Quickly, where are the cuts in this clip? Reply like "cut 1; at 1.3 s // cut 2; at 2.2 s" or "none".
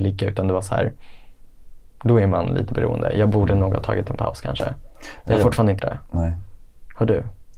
cut 1; at 5.8 s